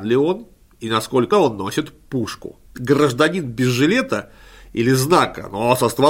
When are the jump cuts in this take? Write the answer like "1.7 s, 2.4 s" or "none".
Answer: 1.3 s, 2.7 s